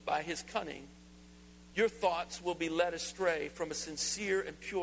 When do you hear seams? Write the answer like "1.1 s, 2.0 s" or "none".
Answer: none